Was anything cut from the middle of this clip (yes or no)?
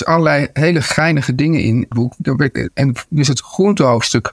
yes